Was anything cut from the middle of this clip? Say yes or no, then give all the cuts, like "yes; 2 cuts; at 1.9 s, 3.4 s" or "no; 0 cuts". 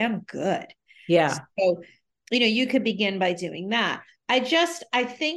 no; 0 cuts